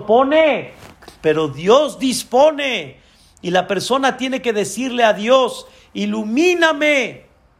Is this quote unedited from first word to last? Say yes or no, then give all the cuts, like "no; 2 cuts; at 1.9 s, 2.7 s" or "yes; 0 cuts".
yes; 0 cuts